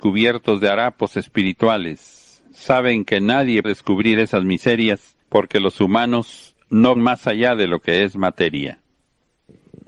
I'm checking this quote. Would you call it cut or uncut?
cut